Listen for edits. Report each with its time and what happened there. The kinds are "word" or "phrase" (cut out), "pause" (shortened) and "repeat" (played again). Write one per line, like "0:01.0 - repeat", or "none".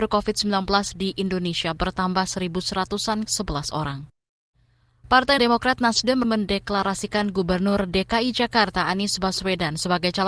0:03.3 - phrase
0:05.4 - word
0:06.2 - word